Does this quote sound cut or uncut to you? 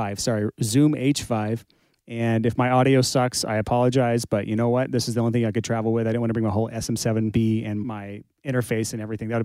uncut